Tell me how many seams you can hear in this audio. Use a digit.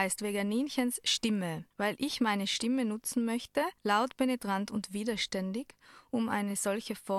2